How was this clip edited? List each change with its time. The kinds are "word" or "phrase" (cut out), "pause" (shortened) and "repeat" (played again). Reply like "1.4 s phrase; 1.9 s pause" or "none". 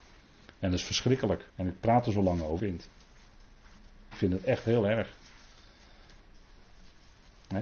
1.5 s pause; 2.6 s phrase